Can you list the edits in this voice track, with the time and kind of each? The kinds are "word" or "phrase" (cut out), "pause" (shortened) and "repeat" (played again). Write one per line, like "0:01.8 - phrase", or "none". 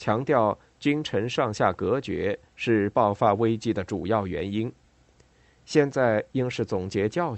none